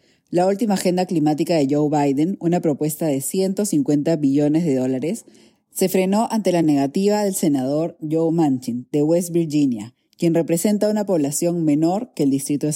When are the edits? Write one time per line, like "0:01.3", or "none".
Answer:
none